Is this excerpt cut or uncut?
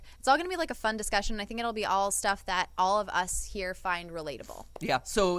uncut